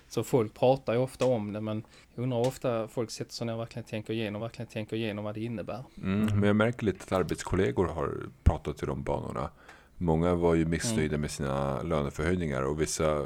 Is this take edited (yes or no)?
yes